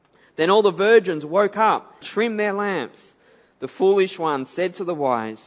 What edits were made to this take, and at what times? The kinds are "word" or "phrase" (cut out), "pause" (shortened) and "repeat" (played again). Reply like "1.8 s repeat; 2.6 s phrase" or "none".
2.0 s word